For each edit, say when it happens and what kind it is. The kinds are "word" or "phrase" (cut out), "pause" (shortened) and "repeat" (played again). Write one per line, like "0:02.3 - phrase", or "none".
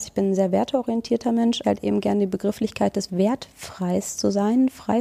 0:01.6 - phrase
0:03.1 - word